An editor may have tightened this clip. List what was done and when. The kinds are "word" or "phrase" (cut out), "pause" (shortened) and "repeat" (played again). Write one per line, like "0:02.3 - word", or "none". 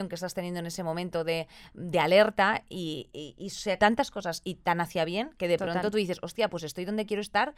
0:03.8 - word